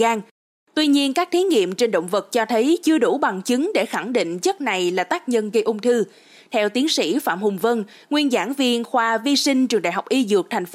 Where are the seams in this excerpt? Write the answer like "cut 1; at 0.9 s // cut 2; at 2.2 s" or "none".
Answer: none